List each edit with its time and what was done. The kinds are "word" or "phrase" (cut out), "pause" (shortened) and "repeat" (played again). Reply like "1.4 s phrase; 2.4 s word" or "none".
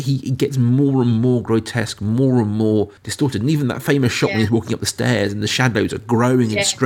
3.0 s pause